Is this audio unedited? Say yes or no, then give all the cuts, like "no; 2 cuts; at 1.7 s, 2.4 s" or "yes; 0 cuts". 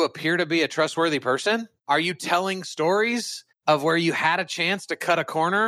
yes; 0 cuts